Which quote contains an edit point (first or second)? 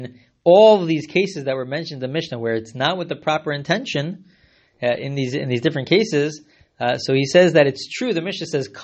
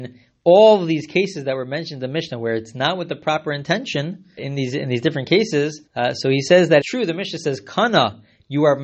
second